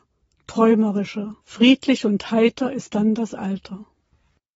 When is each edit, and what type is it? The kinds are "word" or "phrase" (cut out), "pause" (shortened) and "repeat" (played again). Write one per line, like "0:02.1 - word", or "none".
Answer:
0:01.4 - pause